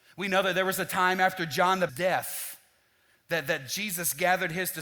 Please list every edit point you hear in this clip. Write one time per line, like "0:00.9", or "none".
0:01.9